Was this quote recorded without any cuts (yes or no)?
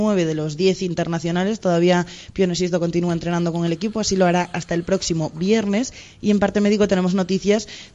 yes